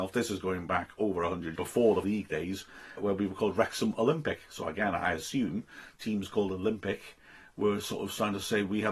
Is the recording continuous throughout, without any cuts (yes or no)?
no